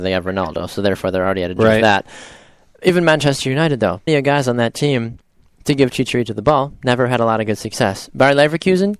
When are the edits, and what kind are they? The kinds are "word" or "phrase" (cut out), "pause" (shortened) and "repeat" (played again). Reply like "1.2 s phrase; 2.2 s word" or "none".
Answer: 1.6 s word; 4.1 s word